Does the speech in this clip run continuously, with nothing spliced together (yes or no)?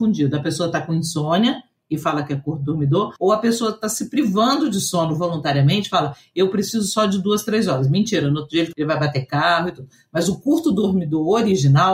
no